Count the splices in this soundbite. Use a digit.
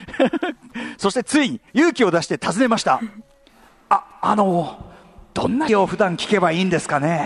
2